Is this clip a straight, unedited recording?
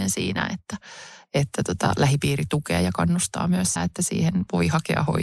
no; 1 cut; at 3.8 s

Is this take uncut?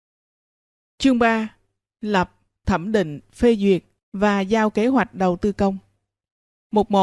yes; 0 cuts

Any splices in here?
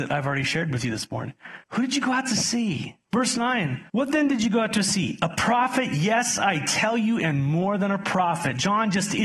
yes; 3 cuts; at 1.6 s, 3.0 s, 3.9 s

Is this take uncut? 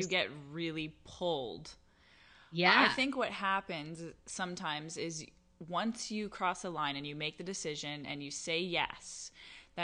yes; 0 cuts

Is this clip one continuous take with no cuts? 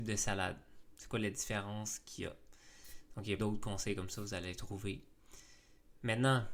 no; 1 cut; at 3.4 s

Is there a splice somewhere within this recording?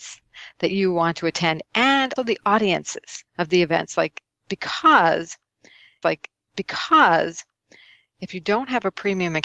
yes; 3 cuts; at 2.2 s, 3.3 s, 6.0 s

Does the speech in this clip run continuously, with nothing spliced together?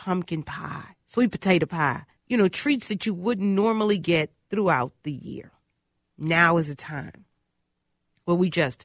no; 2 cuts; at 1.0 s, 2.2 s

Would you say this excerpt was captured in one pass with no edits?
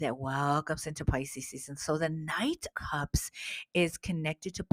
no; 1 cut; at 2.7 s

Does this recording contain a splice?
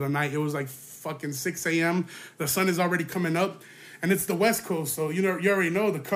no; 0 cuts

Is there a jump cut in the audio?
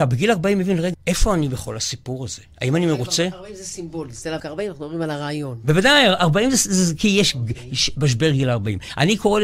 yes; 2 cuts; at 0.9 s, 4.4 s

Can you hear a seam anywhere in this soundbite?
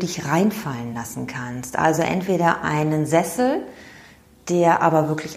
no; 0 cuts

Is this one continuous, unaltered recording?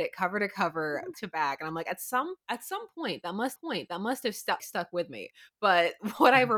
no; 4 cuts; at 1.1 s, 2.4 s, 3.6 s, 4.6 s

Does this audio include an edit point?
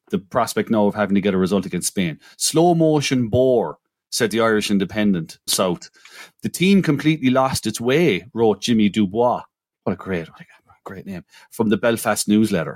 yes; 1 cut; at 5.5 s

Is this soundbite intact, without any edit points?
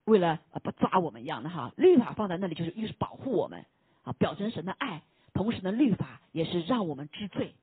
yes; 0 cuts

